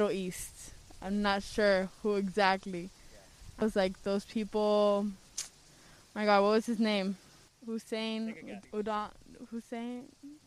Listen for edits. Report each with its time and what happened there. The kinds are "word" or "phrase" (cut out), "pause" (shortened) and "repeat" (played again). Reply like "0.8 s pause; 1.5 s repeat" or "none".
3.6 s word; 8.6 s pause